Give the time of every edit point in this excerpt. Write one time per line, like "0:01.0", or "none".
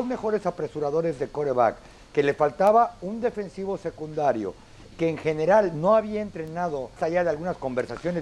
0:04.9
0:07.0